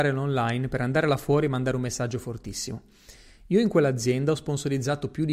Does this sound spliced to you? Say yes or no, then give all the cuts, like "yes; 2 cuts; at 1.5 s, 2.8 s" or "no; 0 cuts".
no; 0 cuts